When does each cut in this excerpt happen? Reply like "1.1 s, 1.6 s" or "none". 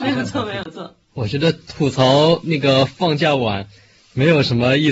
none

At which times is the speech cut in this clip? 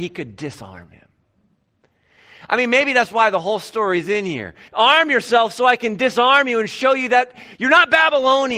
4.7 s

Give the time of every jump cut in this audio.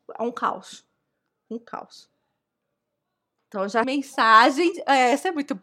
3.8 s

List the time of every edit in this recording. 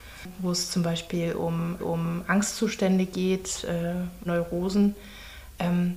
1.8 s, 4.3 s

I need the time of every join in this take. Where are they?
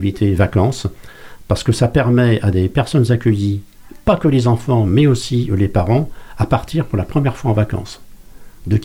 none

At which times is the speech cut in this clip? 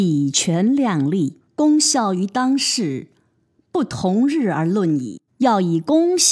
1.5 s, 5.3 s

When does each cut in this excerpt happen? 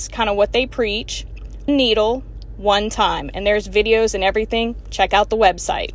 1.7 s, 2.5 s

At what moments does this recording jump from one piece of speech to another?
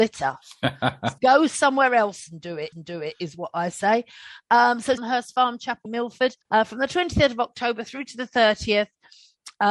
1.2 s, 2.7 s, 5.0 s, 5.9 s, 6.4 s

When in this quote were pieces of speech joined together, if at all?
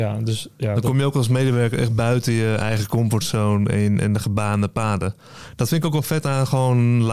none

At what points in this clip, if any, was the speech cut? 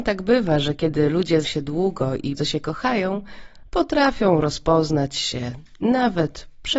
1.4 s, 2.4 s

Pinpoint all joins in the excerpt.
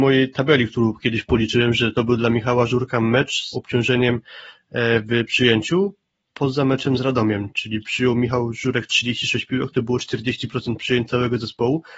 3.5 s

